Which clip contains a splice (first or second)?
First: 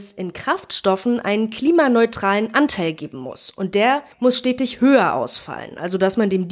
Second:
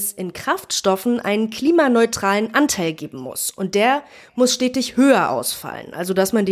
first